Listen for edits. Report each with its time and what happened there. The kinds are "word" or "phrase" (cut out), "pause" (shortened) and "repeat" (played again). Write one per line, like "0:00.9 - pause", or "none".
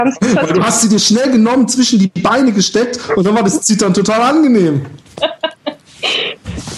none